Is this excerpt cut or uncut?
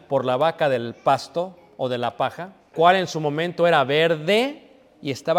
cut